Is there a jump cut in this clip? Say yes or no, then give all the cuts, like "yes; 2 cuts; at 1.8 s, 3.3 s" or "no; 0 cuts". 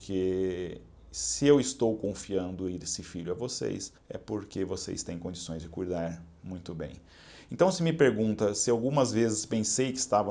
yes; 1 cut; at 4.0 s